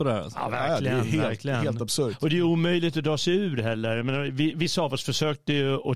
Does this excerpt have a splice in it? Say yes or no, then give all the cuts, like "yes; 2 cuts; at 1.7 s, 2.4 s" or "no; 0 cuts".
no; 0 cuts